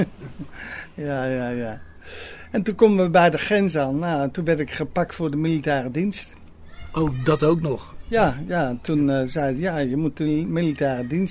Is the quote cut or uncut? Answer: uncut